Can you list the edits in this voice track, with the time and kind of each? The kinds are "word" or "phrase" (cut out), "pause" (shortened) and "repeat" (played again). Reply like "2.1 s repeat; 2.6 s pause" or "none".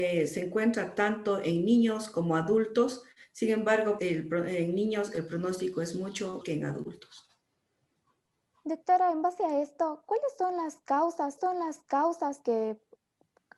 4.0 s word; 6.4 s word; 8.3 s pause; 11.4 s repeat

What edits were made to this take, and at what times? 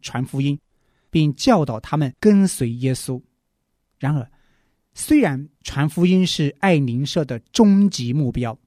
2.2 s pause; 5.6 s pause

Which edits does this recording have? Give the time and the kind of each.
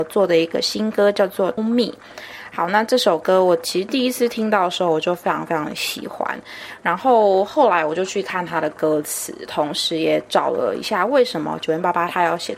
1.6 s word

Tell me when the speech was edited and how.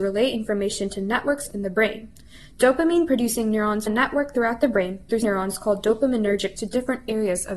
1.5 s word; 3.9 s word; 5.2 s word; 6.6 s word

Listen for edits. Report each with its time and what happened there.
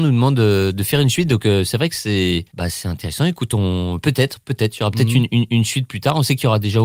2.5 s pause

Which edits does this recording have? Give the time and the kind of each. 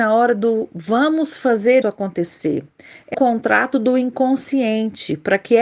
1.8 s word; 3.1 s word

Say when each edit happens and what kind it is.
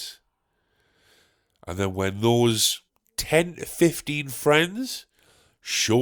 2.9 s pause

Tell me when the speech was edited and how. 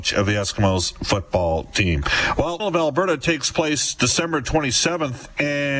2.6 s word

